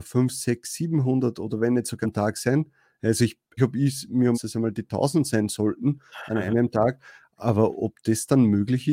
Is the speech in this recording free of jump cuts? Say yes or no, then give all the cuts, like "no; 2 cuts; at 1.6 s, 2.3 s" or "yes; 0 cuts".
no; 3 cuts; at 2.0 s, 3.6 s, 4.3 s